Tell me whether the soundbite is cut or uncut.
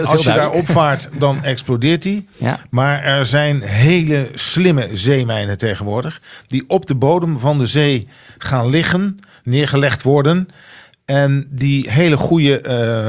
uncut